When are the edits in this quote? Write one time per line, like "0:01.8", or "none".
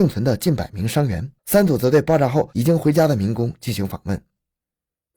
0:01.4

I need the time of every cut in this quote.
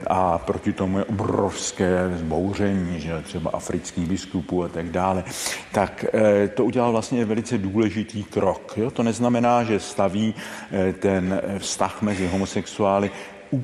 none

